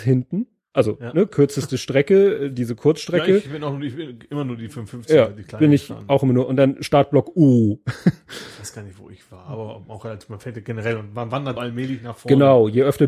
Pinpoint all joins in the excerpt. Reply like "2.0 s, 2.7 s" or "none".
11.6 s